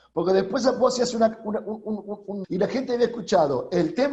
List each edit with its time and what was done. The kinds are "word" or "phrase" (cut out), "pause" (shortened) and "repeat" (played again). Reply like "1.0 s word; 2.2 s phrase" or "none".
2.4 s phrase

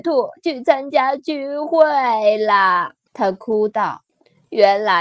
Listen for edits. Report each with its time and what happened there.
3.1 s pause; 4.1 s pause

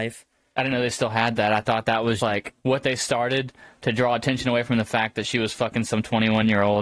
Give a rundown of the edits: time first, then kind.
2.2 s word; 2.6 s pause

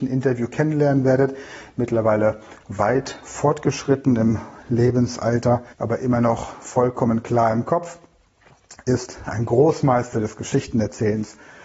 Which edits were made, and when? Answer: 5.7 s pause

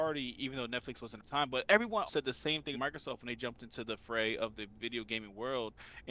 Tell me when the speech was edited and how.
1.2 s word; 2.1 s word; 2.7 s word

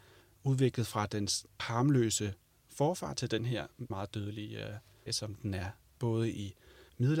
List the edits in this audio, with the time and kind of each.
1.6 s word; 3.9 s word; 5.1 s word; 6.0 s word

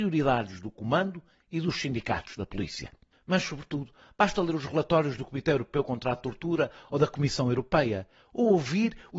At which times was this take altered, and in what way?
none

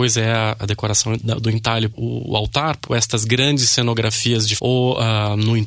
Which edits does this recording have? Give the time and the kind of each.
1.2 s word; 1.9 s word; 2.9 s word; 4.6 s word

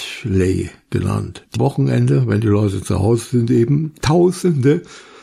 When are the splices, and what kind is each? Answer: 1.5 s phrase

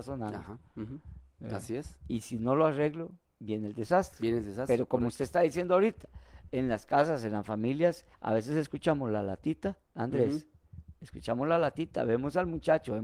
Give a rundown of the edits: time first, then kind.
3.3 s pause; 8.1 s pause; 9.8 s pause

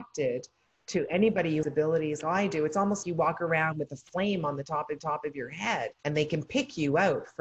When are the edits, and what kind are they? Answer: 1.6 s word; 2.2 s word; 3.0 s word; 5.0 s repeat; 6.0 s pause

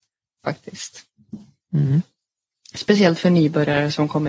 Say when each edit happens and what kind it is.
none

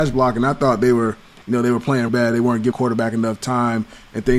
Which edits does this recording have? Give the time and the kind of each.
2.1 s word; 2.7 s word

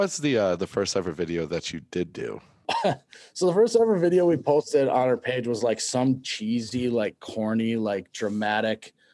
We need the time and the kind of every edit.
none

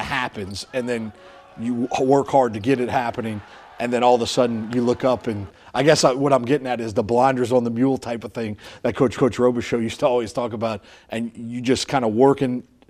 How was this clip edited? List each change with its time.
9.2 s repeat

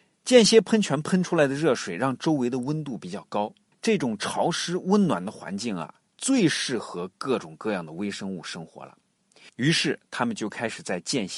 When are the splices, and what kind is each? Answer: 3.7 s pause

